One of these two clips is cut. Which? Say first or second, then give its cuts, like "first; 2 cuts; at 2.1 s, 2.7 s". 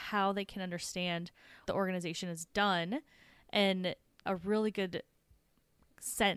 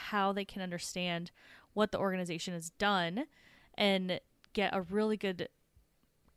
first; 2 cuts; at 1.7 s, 4.3 s